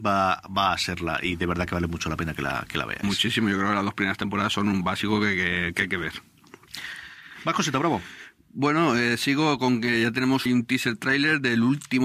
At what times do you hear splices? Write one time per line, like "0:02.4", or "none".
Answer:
0:10.5